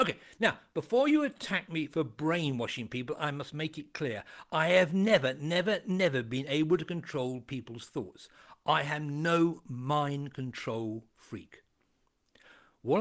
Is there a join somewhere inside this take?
no; 0 cuts

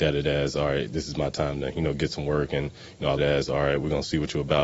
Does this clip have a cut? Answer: yes; 1 cut; at 3.2 s

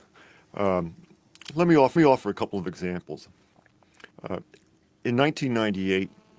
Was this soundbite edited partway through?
yes; 2 cuts; at 2.0 s, 4.1 s

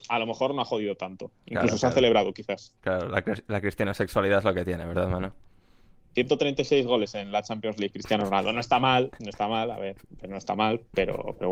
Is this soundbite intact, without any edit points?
yes; 0 cuts

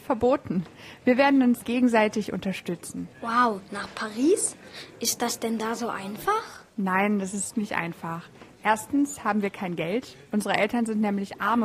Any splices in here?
yes; 4 cuts; at 1.6 s, 3.1 s, 6.7 s, 7.5 s

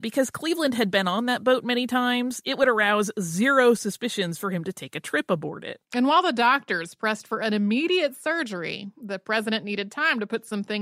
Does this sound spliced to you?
yes; 1 cut; at 5.8 s

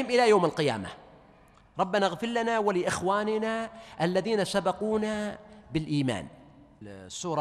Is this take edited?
no; 0 cuts

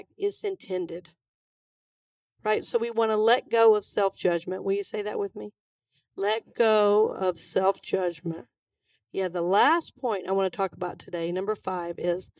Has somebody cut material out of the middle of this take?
no; 0 cuts

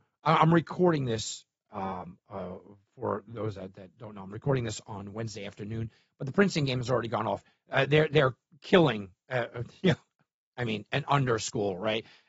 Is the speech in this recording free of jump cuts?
yes; 0 cuts

